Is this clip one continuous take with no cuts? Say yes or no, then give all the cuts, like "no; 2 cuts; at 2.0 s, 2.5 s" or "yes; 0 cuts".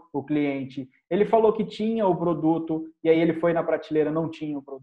yes; 0 cuts